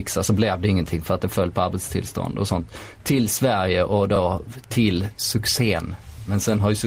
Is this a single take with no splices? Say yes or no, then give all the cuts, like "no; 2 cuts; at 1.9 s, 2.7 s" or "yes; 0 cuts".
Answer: yes; 0 cuts